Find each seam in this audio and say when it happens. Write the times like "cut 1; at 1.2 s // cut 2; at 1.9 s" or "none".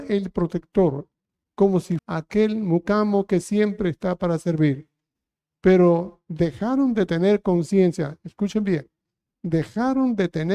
cut 1; at 2.0 s

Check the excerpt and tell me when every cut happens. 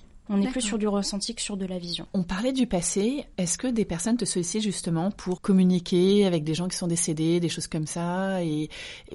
cut 1; at 5.4 s

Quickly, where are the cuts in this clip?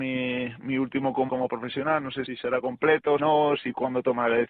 cut 1; at 1.3 s // cut 2; at 2.3 s // cut 3; at 3.2 s

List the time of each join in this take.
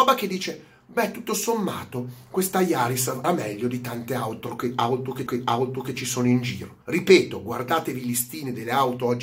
cut 1; at 3.2 s // cut 2; at 5.3 s // cut 3; at 6.8 s

